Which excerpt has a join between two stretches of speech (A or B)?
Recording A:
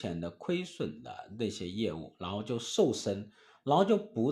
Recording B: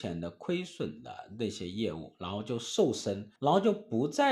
B